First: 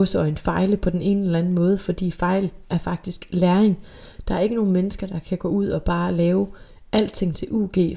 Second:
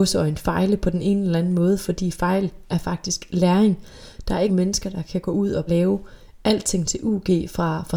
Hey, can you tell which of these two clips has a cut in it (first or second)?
second